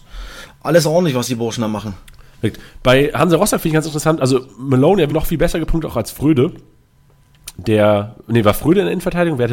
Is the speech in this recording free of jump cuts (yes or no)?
no